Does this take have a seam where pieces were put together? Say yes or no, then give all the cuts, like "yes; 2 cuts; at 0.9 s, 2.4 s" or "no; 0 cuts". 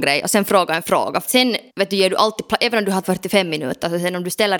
yes; 3 cuts; at 1.2 s, 1.7 s, 3.0 s